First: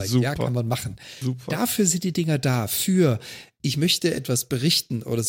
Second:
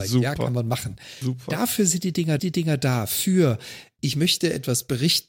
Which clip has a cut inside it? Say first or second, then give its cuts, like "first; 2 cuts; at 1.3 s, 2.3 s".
second; 1 cut; at 2.4 s